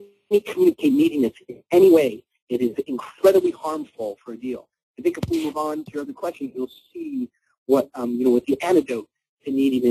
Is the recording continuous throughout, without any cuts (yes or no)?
yes